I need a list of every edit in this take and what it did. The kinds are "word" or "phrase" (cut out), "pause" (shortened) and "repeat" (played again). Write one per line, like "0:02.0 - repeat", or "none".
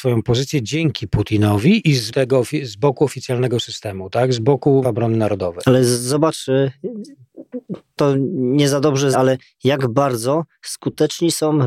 0:02.1 - word
0:04.8 - word
0:08.0 - word
0:09.1 - word

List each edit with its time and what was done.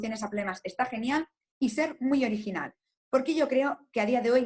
none

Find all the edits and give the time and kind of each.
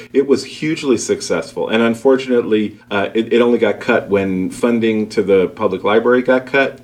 0:02.8 - pause

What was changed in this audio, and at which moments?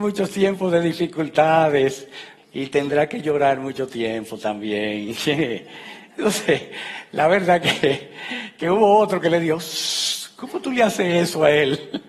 0:02.4 - phrase

